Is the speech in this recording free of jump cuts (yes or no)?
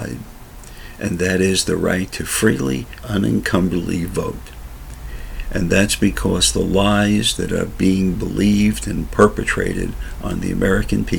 no